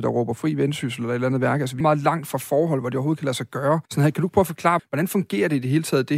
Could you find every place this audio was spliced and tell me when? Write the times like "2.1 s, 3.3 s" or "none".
1.8 s, 3.9 s, 4.8 s